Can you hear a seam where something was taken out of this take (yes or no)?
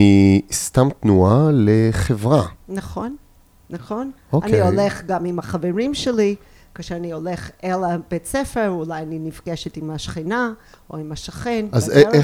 no